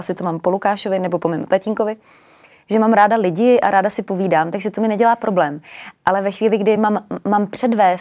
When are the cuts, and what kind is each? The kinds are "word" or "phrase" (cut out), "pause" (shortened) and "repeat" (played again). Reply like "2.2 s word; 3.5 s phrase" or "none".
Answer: none